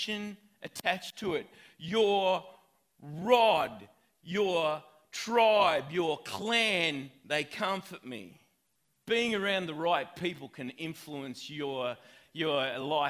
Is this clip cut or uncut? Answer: uncut